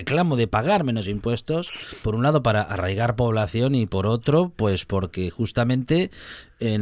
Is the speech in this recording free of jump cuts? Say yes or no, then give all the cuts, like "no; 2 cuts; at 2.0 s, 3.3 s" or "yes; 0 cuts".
no; 1 cut; at 2.0 s